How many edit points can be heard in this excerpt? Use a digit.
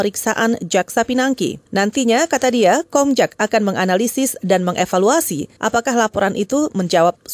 2